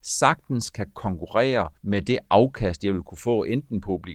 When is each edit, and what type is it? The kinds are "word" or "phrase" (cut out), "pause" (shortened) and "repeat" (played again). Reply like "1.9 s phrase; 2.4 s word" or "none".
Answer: 1.8 s pause

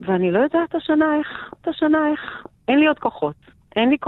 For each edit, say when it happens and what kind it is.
1.6 s repeat

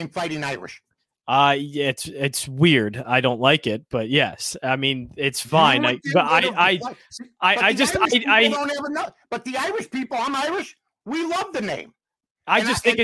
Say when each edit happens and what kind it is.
none

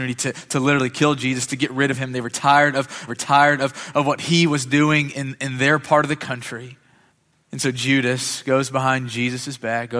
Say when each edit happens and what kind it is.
3.1 s repeat; 5.1 s word; 7.1 s pause

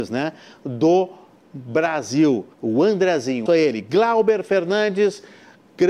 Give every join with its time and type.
2.5 s pause; 3.5 s phrase

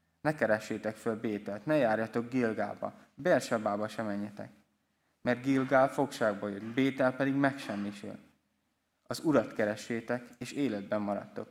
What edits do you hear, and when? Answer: none

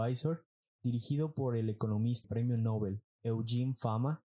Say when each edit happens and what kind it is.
2.2 s word; 3.1 s pause

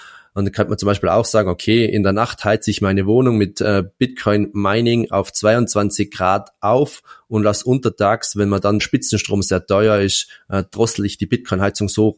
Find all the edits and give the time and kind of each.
8.8 s phrase

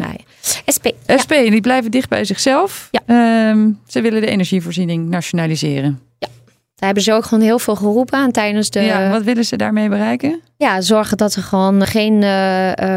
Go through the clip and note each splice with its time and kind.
11.8 s word

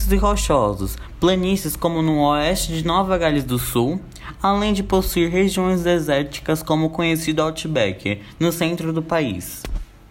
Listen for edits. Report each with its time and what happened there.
none

